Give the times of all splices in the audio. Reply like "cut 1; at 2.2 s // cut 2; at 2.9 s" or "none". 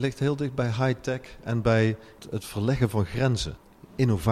none